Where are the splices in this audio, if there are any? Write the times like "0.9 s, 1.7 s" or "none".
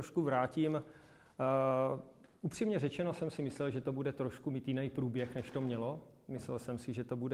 none